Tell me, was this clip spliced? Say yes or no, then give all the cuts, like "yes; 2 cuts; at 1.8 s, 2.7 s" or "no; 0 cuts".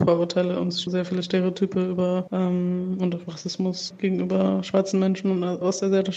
no; 0 cuts